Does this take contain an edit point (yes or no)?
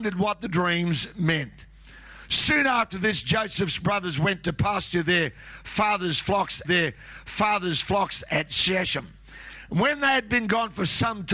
yes